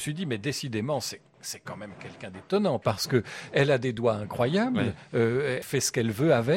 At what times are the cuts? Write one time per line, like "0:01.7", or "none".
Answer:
0:05.6